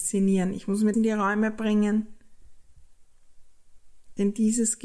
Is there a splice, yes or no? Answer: yes